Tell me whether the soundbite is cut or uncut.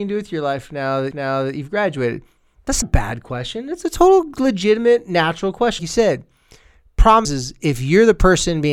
cut